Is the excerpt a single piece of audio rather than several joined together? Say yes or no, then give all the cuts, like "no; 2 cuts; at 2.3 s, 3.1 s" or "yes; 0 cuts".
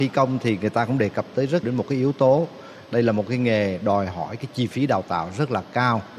no; 1 cut; at 1.6 s